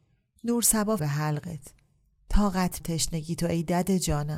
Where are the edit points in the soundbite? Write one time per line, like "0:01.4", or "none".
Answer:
0:01.0
0:02.8

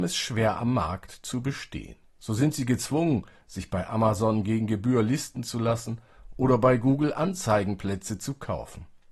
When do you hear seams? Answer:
0:02.1

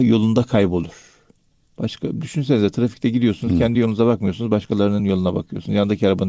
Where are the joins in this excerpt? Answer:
none

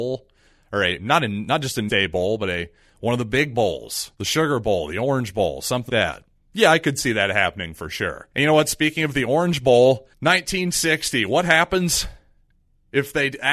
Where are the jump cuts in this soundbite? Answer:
0:01.9
0:04.1
0:05.9
0:08.3
0:10.1

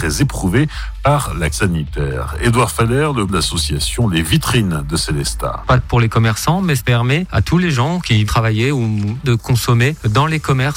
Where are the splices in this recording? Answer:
0:01.5
0:03.3
0:05.8
0:06.8
0:08.3
0:09.2

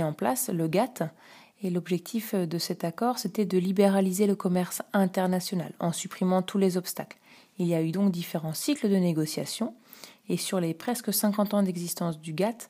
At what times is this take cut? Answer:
none

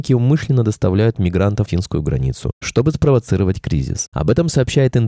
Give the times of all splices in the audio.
0:01.7

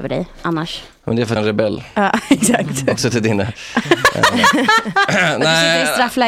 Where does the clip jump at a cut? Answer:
0:01.4
0:03.0

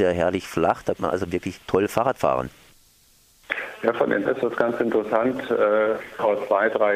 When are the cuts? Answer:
0:01.0
0:01.6
0:04.3

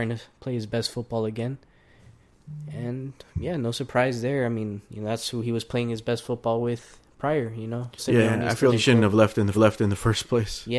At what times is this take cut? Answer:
0:08.0
0:08.7
0:09.5

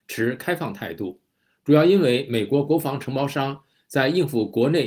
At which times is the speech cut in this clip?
none

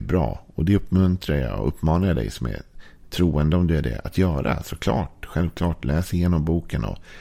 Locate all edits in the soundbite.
none

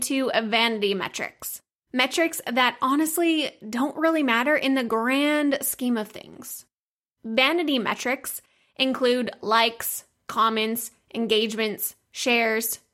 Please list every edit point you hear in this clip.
none

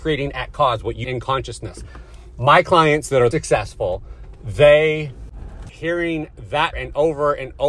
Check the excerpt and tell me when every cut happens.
0:01.0
0:03.3
0:05.7
0:06.7

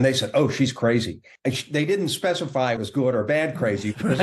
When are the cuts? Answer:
0:02.8

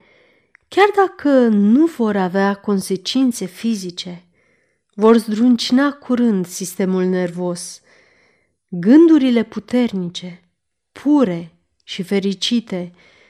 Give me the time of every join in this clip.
none

